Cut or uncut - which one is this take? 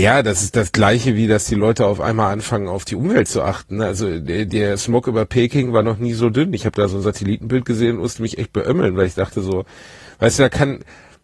uncut